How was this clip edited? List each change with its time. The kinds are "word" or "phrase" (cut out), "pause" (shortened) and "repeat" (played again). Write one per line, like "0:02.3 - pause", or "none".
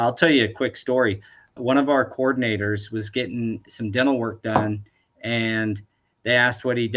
0:01.6 - word
0:03.7 - word